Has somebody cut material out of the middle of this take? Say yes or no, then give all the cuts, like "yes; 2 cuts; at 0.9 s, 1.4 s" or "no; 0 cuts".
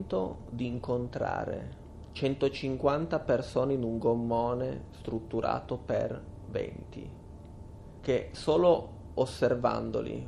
no; 0 cuts